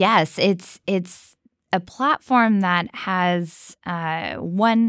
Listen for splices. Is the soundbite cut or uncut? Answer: uncut